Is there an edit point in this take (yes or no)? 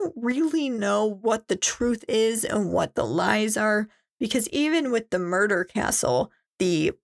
no